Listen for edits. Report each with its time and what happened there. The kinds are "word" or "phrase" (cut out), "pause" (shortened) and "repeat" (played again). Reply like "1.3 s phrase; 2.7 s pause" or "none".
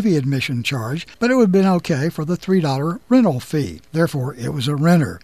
1.1 s pause; 3.9 s pause